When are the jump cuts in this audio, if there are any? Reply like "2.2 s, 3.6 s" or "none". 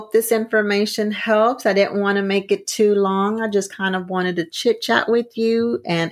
none